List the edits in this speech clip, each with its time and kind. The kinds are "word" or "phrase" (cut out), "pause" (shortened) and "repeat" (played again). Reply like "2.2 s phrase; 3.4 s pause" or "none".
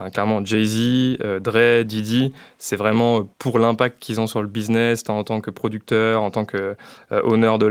3.3 s pause